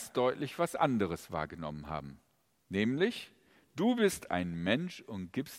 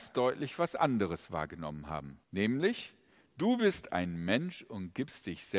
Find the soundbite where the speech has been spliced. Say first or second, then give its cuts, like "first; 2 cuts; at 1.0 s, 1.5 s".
second; 1 cut; at 2.2 s